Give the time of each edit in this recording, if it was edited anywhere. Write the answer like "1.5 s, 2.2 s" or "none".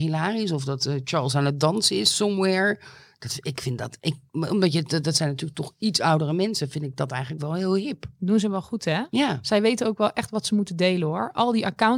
none